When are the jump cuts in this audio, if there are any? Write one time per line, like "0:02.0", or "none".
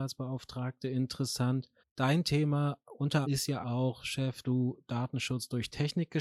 0:01.8
0:03.2
0:03.6
0:04.4

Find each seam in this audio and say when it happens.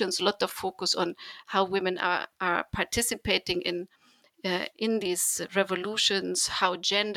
none

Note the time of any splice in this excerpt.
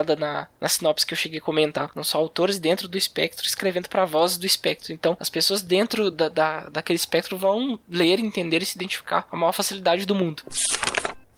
none

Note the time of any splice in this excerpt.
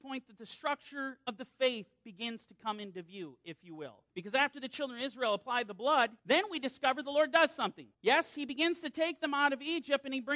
0:04.1
0:06.2
0:07.9

